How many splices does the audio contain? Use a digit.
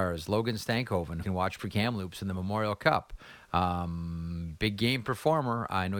2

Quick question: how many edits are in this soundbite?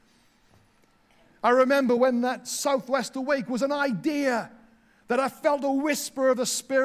0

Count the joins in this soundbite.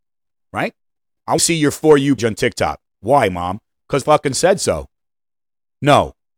3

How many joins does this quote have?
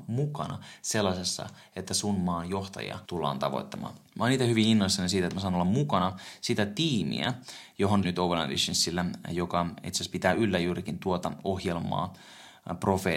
3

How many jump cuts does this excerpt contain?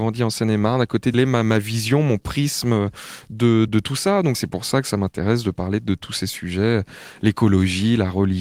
3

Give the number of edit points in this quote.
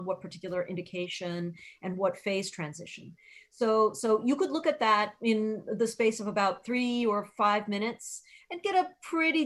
0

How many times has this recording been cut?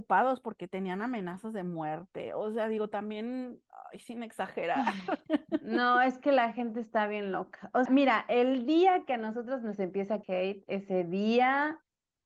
2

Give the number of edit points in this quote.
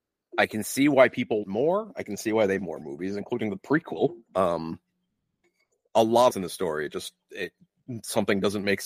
4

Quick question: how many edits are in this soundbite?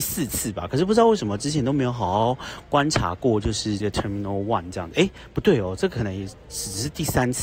1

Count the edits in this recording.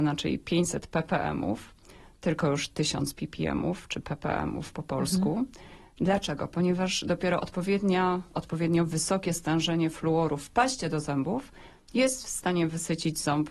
0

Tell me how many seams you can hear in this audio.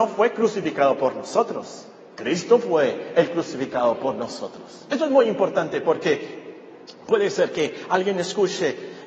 0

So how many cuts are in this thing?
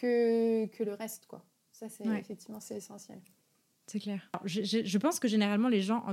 0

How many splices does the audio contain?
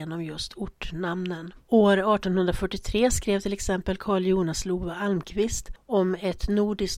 1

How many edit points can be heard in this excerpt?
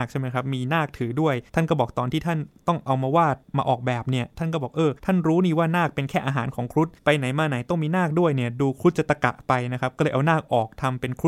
4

